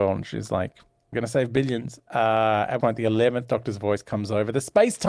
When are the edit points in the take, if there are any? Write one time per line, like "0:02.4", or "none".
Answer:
0:01.1
0:02.8